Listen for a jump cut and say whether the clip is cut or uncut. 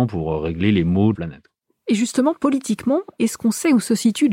cut